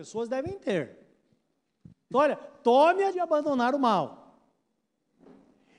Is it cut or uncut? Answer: cut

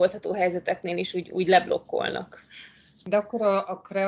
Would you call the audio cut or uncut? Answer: uncut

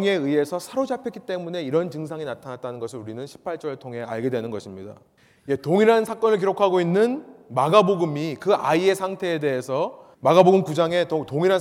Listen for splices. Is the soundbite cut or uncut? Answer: cut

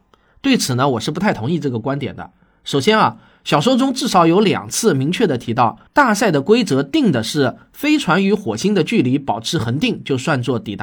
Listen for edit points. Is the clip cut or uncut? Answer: cut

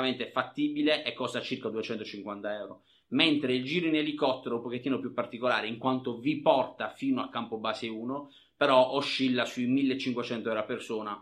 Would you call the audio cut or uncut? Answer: uncut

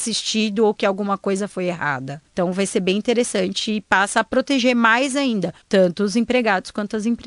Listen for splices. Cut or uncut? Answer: cut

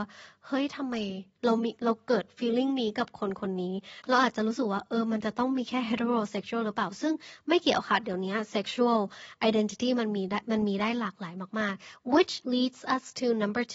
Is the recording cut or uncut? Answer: cut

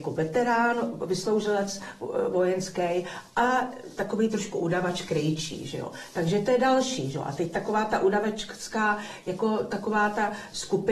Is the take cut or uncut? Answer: uncut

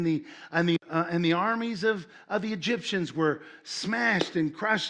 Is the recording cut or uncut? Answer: uncut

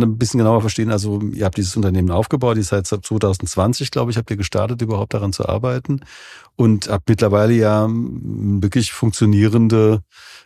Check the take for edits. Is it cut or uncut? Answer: uncut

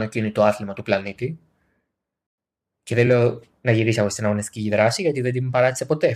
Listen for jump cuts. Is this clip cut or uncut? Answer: uncut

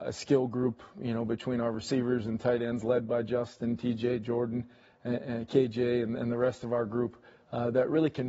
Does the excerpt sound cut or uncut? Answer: uncut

